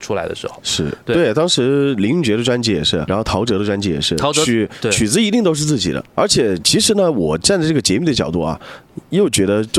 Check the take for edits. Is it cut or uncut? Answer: cut